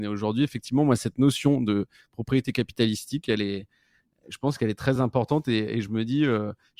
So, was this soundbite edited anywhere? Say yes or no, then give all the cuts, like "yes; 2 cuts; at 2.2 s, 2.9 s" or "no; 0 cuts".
no; 0 cuts